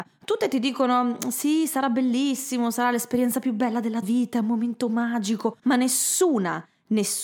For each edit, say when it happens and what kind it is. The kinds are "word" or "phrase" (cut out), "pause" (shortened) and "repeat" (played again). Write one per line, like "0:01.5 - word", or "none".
0:04.0 - word
0:05.6 - pause